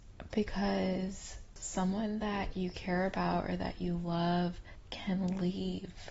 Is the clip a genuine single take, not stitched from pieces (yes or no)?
yes